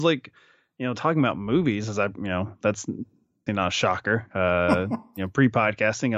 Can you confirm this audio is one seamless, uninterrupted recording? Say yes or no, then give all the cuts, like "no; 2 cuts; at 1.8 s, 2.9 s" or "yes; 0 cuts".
no; 1 cut; at 3.5 s